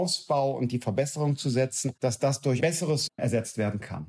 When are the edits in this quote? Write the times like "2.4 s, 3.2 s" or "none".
2.0 s, 2.6 s, 3.1 s